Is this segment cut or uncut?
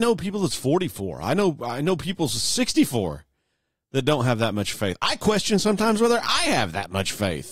uncut